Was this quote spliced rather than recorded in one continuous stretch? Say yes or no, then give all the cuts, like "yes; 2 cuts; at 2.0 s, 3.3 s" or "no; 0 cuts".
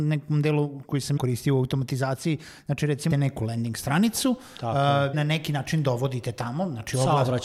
yes; 3 cuts; at 1.2 s, 3.1 s, 5.1 s